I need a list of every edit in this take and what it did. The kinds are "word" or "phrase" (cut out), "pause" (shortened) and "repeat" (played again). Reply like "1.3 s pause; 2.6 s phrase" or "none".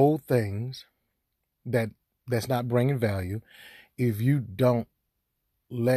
none